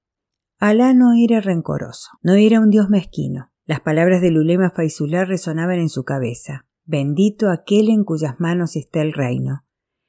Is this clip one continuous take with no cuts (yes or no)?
no